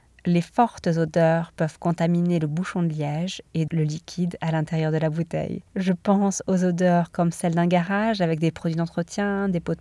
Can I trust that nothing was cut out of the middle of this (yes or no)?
no